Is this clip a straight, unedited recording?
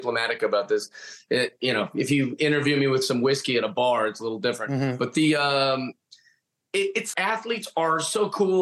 no; 1 cut; at 7.1 s

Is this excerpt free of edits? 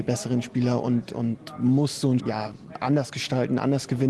no; 1 cut; at 2.2 s

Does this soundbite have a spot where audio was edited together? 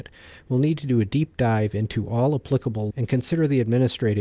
yes; 1 cut; at 2.9 s

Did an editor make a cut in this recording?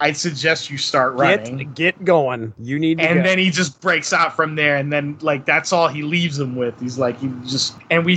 no; 0 cuts

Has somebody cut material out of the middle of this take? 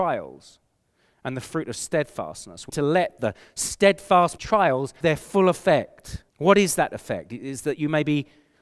yes; 4 cuts; at 2.7 s, 4.4 s, 5.0 s, 6.3 s

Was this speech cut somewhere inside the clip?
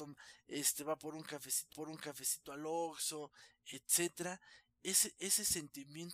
yes; 1 cut; at 1.7 s

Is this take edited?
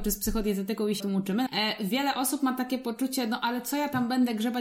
yes; 2 cuts; at 1.0 s, 1.5 s

